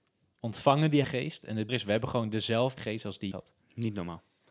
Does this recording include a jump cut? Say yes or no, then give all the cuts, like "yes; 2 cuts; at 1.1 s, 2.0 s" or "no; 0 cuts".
yes; 4 cuts; at 1.0 s, 1.7 s, 2.8 s, 3.3 s